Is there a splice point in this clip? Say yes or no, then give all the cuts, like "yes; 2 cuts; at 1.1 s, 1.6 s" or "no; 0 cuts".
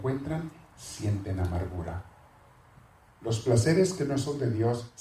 no; 0 cuts